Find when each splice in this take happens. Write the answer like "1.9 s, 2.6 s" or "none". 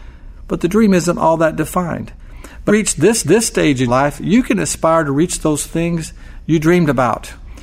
2.7 s, 3.2 s, 3.9 s

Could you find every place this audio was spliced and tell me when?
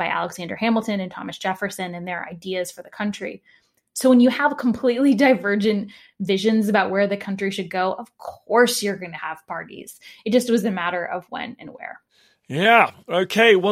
none

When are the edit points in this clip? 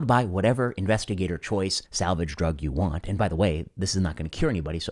1.9 s

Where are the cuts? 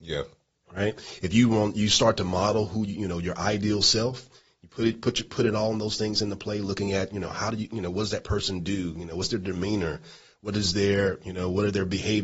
none

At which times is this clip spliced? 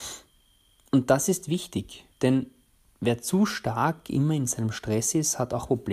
2.1 s

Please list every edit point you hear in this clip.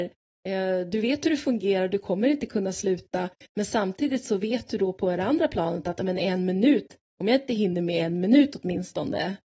none

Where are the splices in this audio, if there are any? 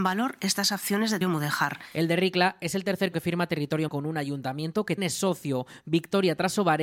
1.2 s, 3.1 s, 3.9 s, 5.0 s

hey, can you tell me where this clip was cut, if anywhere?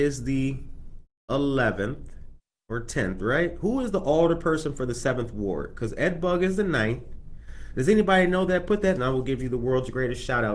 9.0 s

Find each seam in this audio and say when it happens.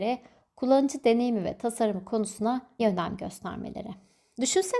2.8 s

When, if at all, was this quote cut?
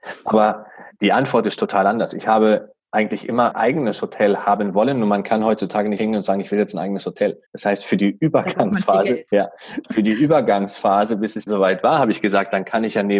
1.0 s, 2.8 s, 3.5 s, 6.0 s, 7.5 s, 9.3 s, 11.5 s

